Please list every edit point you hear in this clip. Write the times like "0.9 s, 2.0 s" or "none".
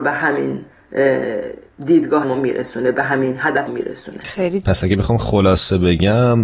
2.2 s, 3.7 s, 4.6 s, 5.2 s